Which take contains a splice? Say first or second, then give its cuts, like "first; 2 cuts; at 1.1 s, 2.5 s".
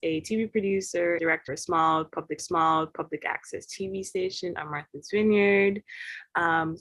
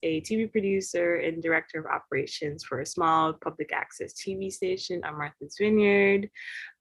first; 3 cuts; at 1.2 s, 1.5 s, 2.4 s